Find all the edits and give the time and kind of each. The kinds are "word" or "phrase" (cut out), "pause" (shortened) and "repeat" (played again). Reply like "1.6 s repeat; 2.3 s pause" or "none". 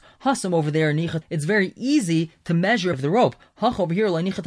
1.2 s word; 2.9 s phrase